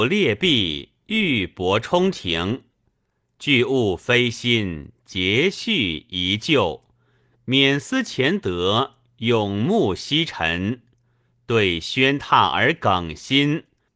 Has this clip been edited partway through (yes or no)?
no